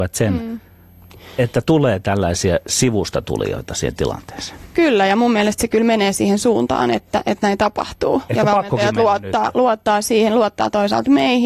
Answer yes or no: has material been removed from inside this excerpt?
no